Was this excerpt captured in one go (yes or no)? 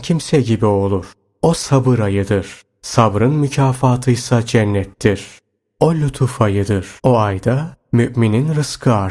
no